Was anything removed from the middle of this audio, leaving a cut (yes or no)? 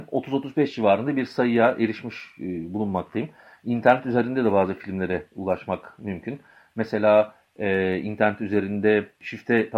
no